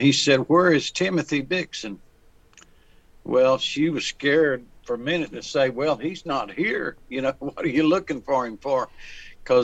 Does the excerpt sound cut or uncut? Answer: uncut